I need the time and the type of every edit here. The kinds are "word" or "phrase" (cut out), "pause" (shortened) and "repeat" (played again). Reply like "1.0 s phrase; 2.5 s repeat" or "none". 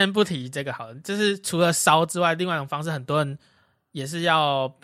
none